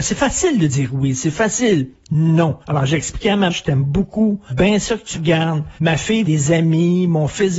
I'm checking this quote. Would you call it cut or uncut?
cut